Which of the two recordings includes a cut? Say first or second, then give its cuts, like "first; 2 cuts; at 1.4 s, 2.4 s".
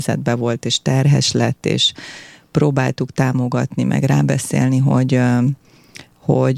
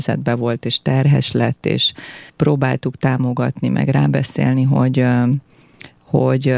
second; 1 cut; at 2.3 s